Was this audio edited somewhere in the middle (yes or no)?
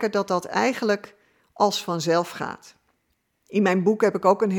no